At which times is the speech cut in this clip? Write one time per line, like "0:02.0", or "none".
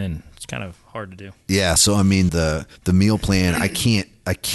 0:02.3
0:02.8